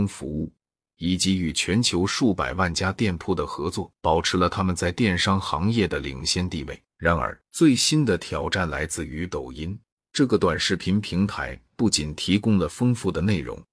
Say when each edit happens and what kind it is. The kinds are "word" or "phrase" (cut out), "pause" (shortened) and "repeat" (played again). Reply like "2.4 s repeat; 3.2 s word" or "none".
4.0 s pause; 6.9 s pause; 7.5 s pause; 9.9 s pause